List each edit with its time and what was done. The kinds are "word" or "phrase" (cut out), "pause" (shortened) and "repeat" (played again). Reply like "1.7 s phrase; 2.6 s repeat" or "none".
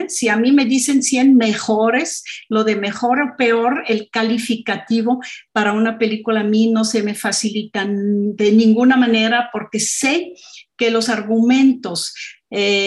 none